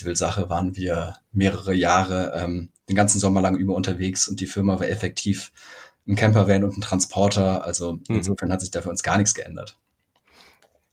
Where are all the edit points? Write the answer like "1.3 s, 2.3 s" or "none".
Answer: none